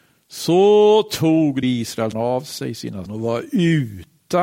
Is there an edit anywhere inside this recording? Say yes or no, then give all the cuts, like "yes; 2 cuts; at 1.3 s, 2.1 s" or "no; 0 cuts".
yes; 3 cuts; at 1.6 s, 2.1 s, 3.1 s